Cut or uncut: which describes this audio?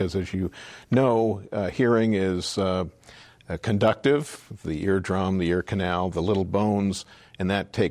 uncut